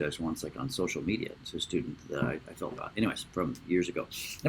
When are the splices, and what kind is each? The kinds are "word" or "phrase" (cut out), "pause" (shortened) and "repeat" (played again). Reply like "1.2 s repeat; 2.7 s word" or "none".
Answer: 2.8 s word